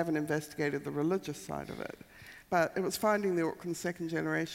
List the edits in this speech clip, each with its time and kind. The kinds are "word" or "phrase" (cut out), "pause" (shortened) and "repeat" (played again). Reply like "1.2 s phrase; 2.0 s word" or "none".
2.4 s pause